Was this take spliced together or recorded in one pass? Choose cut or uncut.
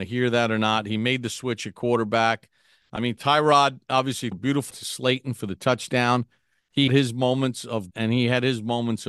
cut